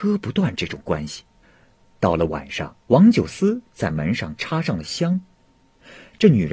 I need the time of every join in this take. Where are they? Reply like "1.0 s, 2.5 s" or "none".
1.4 s, 2.8 s

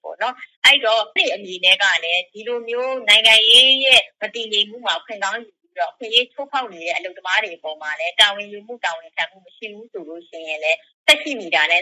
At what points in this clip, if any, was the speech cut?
1.2 s

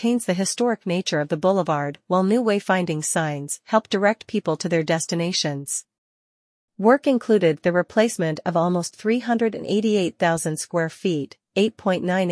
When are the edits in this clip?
none

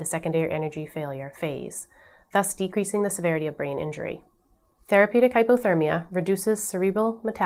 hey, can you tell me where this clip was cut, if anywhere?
none

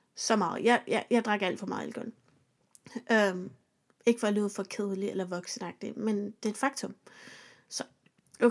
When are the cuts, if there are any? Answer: none

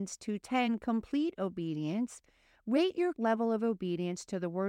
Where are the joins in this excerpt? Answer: 3.1 s

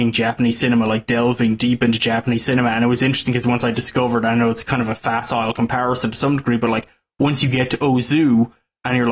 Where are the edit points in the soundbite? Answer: none

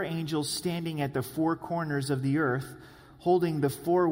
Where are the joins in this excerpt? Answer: none

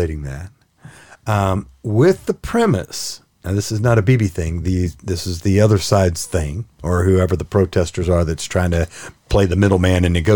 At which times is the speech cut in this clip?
none

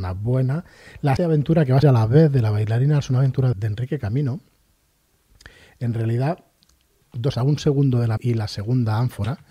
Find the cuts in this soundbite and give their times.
1.2 s, 1.8 s, 3.0 s, 3.5 s, 7.0 s, 7.3 s, 8.2 s

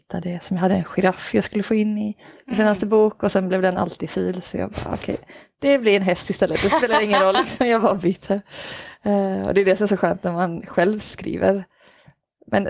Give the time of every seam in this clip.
none

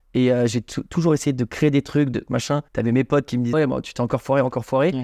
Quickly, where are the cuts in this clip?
2.7 s, 3.5 s

